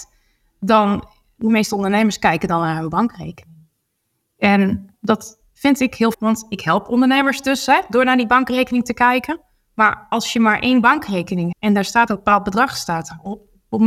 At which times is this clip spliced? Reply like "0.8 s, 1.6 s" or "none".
4.9 s, 6.1 s, 11.5 s, 12.1 s